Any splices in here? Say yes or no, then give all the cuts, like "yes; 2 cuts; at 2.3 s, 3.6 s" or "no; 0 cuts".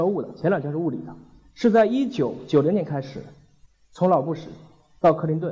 no; 0 cuts